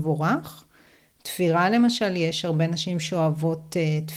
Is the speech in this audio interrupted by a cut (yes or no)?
no